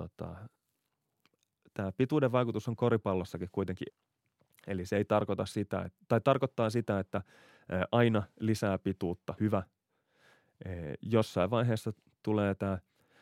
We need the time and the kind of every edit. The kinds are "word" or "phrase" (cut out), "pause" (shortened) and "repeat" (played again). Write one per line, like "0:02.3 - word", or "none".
0:03.9 - word
0:09.4 - word